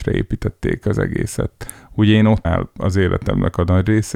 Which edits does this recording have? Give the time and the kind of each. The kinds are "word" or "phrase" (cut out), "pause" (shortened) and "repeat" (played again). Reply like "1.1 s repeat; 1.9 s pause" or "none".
2.4 s word